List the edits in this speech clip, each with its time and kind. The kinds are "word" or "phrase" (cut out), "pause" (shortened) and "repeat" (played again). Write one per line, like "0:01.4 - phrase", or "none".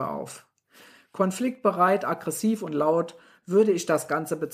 none